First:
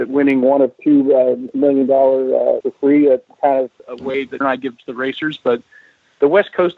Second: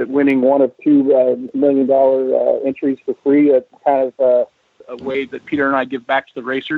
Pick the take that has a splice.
first; 4 cuts; at 2.6 s, 3.7 s, 4.4 s, 4.8 s

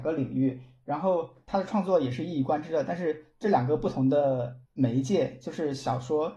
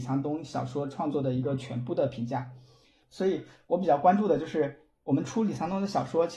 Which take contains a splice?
first; 1 cut; at 4.6 s

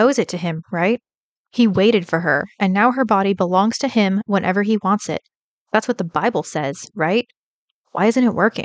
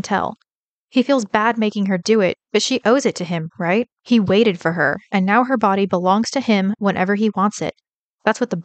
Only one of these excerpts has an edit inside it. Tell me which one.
second; 1 cut; at 3.9 s

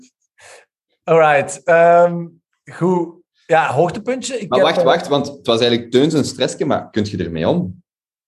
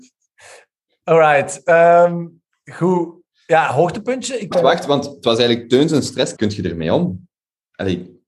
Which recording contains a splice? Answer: second; 2 cuts; at 4.5 s, 6.4 s

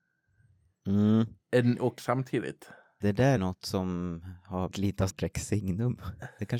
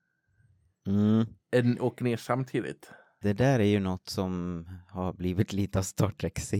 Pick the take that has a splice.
first; 4 cuts; at 2.0 s, 3.4 s, 4.7 s, 5.1 s

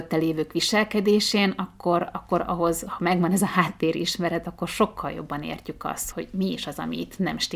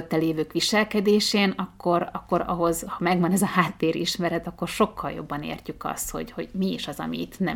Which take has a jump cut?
first; 1 cut; at 6.1 s

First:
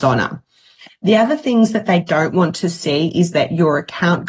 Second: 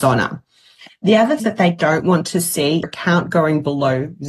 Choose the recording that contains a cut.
second; 2 cuts; at 1.4 s, 2.8 s

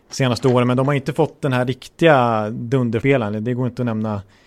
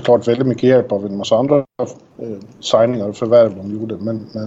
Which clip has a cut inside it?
first; 1 cut; at 3.0 s

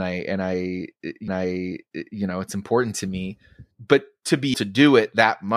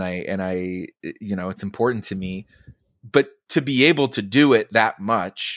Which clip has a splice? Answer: first; 3 cuts; at 1.3 s, 3.7 s, 4.5 s

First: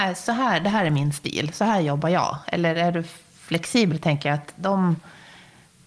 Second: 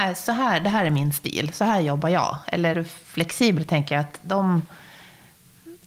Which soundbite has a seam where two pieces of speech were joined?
second; 2 cuts; at 2.7 s, 3.0 s

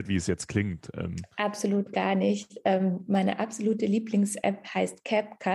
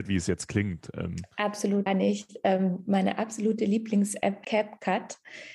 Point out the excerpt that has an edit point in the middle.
second; 2 cuts; at 1.9 s, 4.4 s

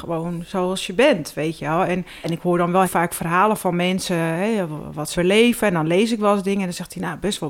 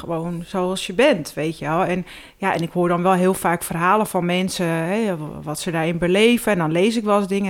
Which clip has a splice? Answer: first; 3 cuts; at 2.2 s, 2.8 s, 5.1 s

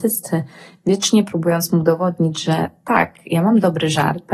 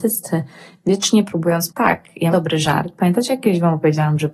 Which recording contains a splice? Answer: second; 2 cuts; at 1.7 s, 2.3 s

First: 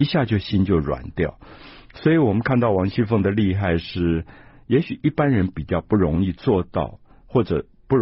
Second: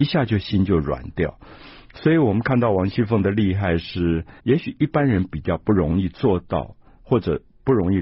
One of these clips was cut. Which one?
second; 1 cut; at 4.4 s

